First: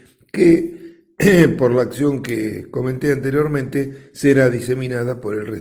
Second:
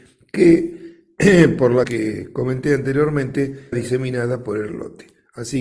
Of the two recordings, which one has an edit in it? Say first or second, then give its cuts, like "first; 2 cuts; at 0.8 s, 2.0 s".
second; 3 cuts; at 1.8 s, 3.7 s, 4.7 s